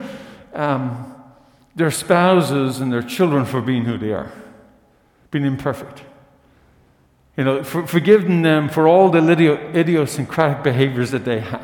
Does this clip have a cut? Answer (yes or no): no